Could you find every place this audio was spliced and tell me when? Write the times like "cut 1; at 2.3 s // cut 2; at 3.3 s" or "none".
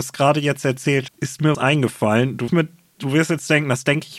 cut 1; at 1.1 s // cut 2; at 1.5 s // cut 3; at 2.5 s